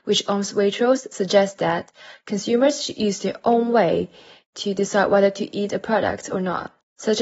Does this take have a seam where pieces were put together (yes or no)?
no